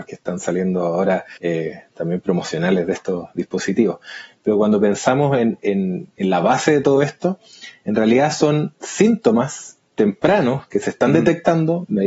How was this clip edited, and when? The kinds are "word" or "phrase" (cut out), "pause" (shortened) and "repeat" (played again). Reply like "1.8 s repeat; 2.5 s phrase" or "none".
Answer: 1.4 s pause; 6.1 s pause